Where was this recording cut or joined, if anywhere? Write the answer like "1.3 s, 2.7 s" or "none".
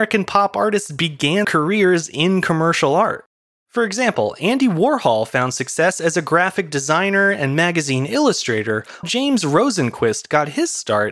1.4 s, 9.0 s